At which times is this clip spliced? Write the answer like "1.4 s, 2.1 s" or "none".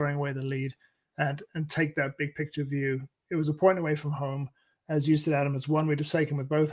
none